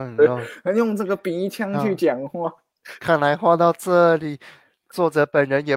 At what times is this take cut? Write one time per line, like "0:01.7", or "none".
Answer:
none